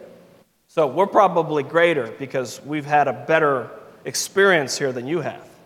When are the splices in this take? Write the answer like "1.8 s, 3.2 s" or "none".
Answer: none